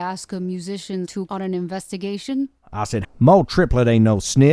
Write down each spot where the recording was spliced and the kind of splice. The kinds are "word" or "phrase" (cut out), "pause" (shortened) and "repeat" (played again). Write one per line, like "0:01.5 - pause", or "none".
0:01.3 - word
0:03.0 - word